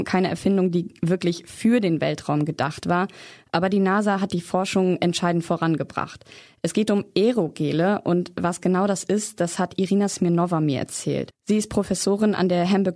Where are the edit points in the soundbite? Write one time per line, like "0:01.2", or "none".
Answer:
none

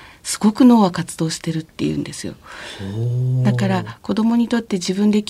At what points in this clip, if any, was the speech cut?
0:01.7

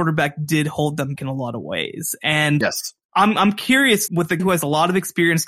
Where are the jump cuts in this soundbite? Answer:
0:01.2
0:02.6
0:04.1
0:04.4

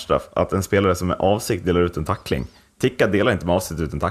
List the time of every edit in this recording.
none

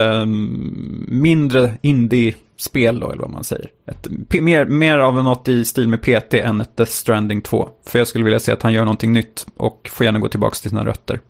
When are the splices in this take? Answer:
none

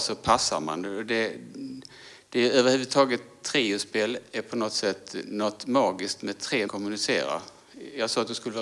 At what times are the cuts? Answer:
0:06.7

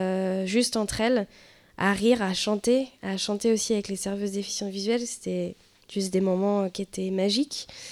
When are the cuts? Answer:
0:05.8

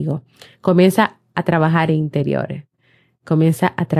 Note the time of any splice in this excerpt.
0:01.9

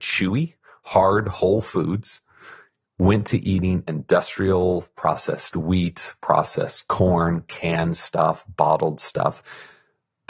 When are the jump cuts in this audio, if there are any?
none

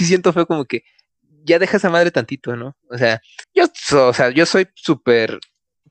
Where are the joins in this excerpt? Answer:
0:03.4

